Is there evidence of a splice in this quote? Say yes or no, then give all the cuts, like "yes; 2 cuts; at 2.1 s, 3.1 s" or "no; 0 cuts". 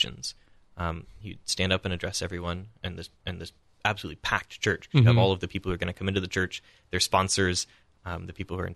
yes; 1 cut; at 3.2 s